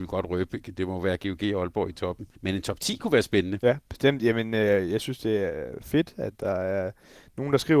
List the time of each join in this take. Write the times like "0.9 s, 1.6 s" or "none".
none